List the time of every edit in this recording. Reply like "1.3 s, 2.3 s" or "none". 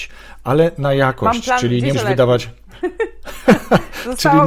1.9 s